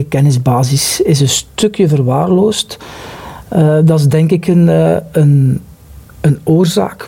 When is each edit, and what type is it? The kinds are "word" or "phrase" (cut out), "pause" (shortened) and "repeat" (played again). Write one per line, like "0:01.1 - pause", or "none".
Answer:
none